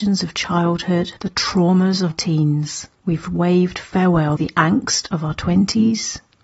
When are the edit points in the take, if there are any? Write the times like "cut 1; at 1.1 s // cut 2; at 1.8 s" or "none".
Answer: cut 1; at 1.2 s // cut 2; at 2.1 s // cut 3; at 2.9 s // cut 4; at 4.4 s